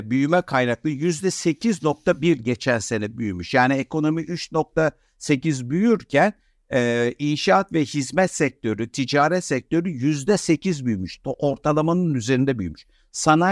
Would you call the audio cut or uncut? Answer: uncut